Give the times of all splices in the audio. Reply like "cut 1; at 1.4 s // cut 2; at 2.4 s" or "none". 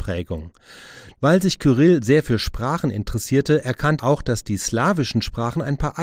cut 1; at 4.0 s